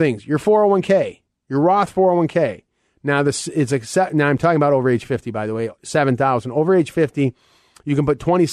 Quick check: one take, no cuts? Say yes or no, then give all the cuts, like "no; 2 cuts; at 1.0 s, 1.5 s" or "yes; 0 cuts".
yes; 0 cuts